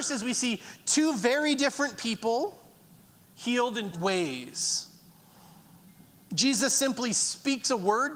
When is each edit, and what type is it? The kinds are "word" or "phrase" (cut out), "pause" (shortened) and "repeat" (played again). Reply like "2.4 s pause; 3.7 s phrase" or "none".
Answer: 3.9 s phrase